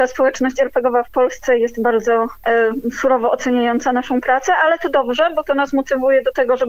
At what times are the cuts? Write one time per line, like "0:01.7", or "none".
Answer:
none